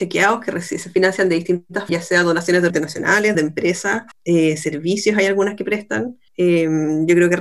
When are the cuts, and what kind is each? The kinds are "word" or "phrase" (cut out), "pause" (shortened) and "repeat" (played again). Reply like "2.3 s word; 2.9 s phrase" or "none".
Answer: 1.9 s word; 2.7 s word; 3.3 s word; 4.1 s pause; 6.3 s pause

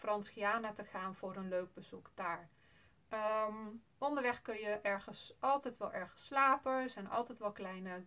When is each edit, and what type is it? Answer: 3.9 s pause

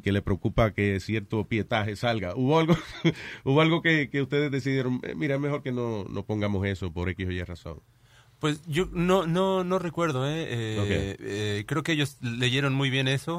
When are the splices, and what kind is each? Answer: none

